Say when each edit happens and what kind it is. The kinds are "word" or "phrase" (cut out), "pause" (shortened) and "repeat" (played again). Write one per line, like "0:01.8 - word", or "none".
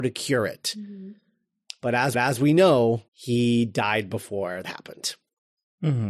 0:02.1 - repeat
0:03.1 - pause
0:04.6 - word